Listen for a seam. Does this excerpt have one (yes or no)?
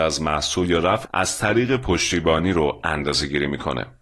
yes